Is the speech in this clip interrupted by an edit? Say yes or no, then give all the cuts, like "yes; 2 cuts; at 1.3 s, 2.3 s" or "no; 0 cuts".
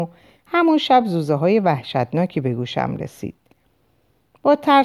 no; 0 cuts